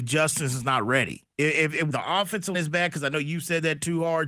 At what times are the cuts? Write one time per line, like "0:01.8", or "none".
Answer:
0:01.3
0:01.9
0:02.5